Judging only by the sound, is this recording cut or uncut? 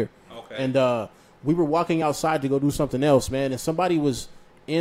uncut